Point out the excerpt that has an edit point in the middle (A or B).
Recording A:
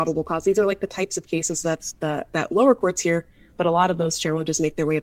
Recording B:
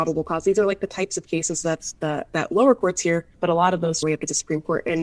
B